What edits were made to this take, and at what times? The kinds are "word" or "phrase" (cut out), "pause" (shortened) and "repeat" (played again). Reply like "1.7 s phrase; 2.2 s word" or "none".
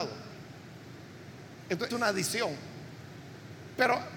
1.9 s word

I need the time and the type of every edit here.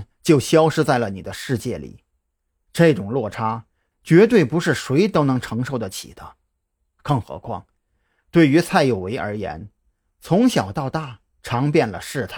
none

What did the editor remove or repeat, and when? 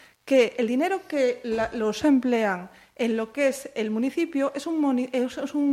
2.0 s word

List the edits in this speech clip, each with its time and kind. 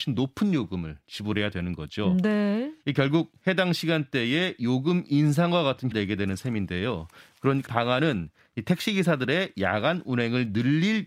5.9 s word; 7.7 s word

